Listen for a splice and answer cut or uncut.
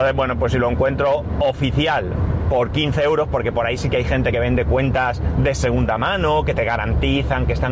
uncut